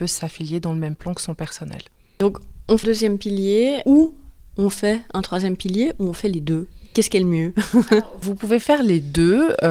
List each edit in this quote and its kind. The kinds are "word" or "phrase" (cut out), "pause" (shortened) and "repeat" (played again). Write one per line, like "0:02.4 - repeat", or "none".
0:02.8 - word